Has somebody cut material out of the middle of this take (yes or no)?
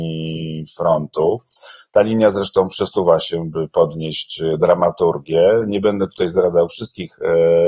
no